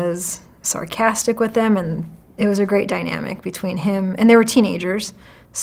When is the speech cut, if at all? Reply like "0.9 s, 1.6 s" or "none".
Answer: none